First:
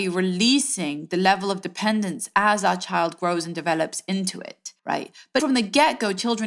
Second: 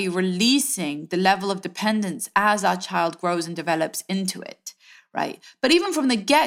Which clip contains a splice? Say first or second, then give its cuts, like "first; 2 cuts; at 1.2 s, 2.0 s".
first; 2 cuts; at 4.8 s, 5.4 s